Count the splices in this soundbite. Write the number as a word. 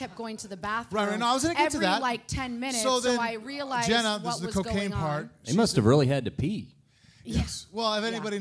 zero